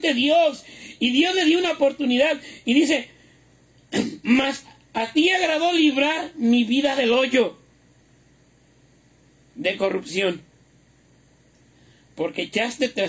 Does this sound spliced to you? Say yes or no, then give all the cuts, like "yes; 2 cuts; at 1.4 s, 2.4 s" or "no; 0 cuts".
no; 0 cuts